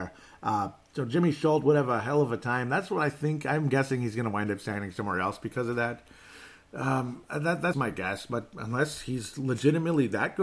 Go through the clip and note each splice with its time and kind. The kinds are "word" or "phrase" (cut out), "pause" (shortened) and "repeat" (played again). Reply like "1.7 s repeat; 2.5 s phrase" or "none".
7.7 s word